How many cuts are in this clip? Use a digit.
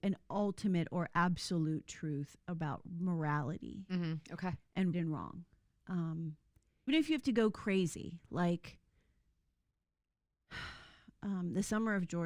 2